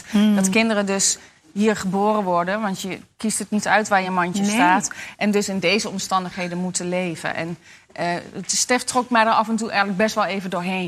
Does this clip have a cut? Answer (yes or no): no